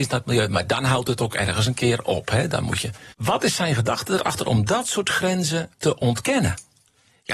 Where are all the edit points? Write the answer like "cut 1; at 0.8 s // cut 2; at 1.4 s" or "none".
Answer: cut 1; at 3.1 s // cut 2; at 5.7 s